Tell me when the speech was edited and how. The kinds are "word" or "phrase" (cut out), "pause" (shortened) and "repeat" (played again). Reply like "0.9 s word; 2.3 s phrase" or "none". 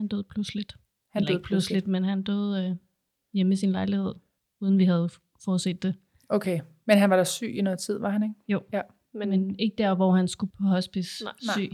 10.5 s word